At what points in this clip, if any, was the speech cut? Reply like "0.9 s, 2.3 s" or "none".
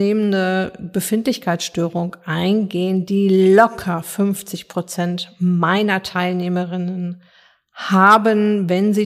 none